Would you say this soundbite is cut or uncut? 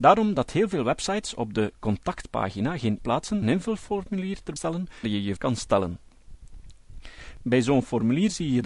cut